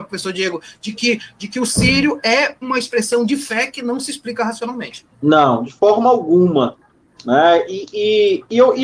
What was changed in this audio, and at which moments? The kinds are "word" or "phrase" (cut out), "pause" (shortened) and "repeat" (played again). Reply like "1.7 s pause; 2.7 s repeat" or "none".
2.6 s word; 5.1 s pause